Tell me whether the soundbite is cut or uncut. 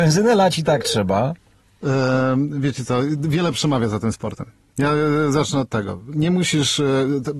uncut